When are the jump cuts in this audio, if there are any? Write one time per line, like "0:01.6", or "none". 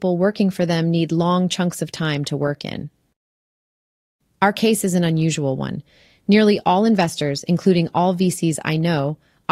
none

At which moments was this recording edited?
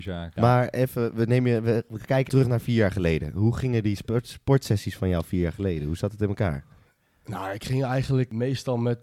0:02.3

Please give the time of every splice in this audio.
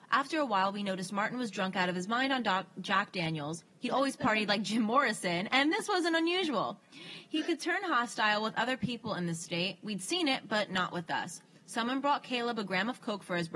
none

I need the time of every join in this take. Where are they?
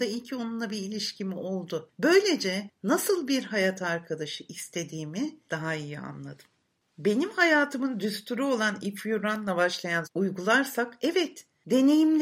0:10.0

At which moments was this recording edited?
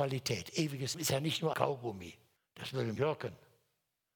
0:00.9
0:01.5
0:02.4
0:03.0

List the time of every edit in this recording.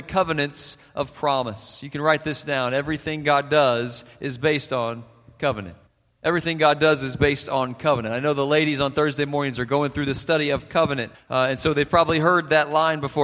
0:05.9
0:11.1

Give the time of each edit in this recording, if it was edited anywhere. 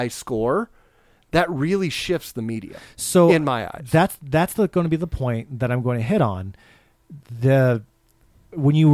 none

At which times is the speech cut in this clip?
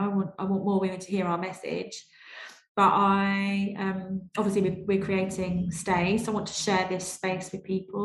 none

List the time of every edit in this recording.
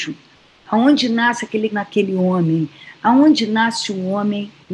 0:01.7

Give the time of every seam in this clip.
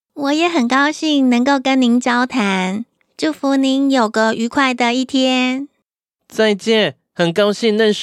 none

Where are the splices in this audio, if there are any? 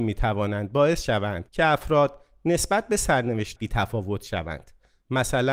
0:01.5
0:03.6

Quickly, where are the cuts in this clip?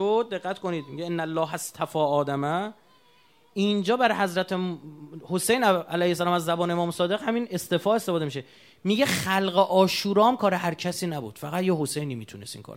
none

